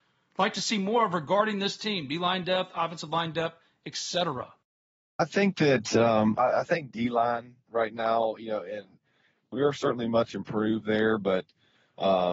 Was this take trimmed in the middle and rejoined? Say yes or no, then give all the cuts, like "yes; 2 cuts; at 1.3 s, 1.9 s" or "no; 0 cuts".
no; 0 cuts